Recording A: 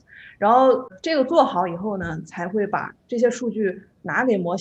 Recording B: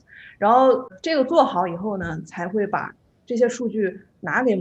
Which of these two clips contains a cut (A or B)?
A